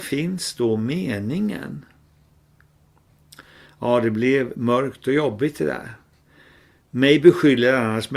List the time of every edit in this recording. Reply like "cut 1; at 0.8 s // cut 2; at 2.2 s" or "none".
none